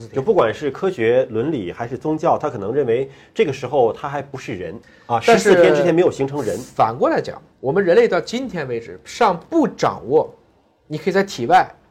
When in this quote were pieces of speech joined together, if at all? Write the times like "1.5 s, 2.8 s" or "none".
7.5 s